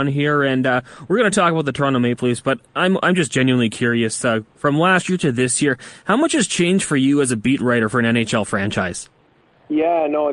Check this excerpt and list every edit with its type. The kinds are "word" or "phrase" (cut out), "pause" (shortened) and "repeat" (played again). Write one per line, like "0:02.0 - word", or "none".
none